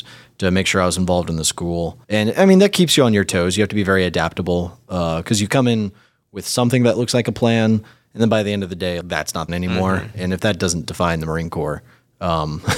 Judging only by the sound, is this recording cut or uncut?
cut